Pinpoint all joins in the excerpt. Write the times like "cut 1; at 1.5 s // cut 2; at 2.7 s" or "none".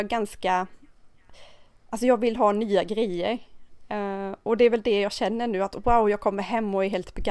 none